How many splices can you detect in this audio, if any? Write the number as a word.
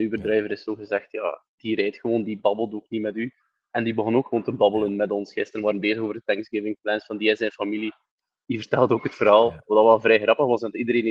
one